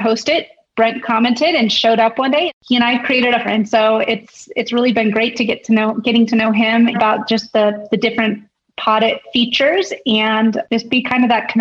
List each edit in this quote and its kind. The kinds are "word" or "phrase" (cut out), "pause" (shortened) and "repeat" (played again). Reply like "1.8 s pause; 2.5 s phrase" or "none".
3.4 s phrase; 6.9 s phrase